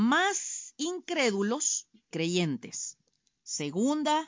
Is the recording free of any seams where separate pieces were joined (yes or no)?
no